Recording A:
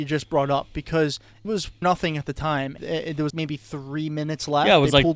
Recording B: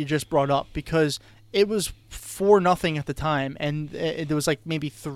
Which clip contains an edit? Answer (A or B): A